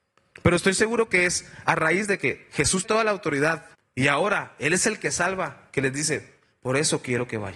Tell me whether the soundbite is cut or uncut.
cut